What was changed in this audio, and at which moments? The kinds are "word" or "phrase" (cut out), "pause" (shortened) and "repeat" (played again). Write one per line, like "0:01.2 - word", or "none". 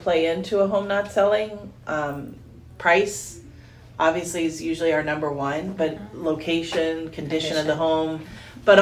none